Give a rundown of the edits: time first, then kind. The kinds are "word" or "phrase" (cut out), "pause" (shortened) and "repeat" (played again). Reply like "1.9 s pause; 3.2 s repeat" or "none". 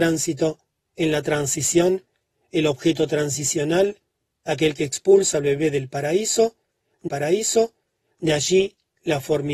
7.1 s repeat